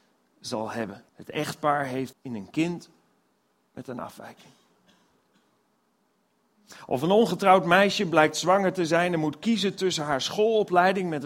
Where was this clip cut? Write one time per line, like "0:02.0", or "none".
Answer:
0:01.1
0:02.1